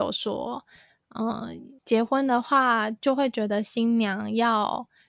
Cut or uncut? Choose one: cut